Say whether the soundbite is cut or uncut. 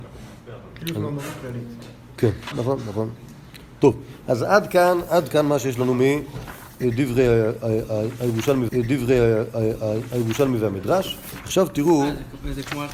cut